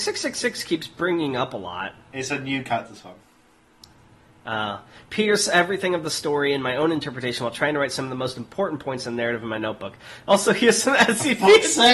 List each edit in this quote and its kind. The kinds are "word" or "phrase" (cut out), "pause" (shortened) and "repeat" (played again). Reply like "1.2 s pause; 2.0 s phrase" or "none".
none